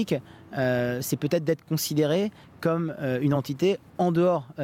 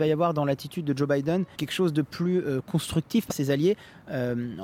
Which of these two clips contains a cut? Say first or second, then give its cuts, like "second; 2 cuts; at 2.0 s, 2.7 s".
second; 2 cuts; at 1.5 s, 3.3 s